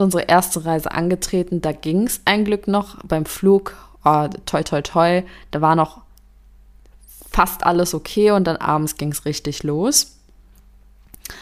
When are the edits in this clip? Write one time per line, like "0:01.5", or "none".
none